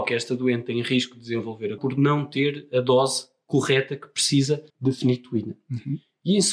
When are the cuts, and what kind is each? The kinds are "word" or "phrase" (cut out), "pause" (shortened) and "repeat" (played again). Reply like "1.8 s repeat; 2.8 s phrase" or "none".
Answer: 1.8 s word; 4.7 s pause